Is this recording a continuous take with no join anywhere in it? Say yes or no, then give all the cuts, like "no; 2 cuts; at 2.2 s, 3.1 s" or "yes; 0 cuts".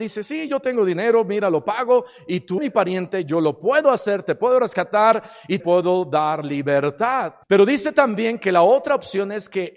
no; 3 cuts; at 2.6 s, 5.6 s, 7.4 s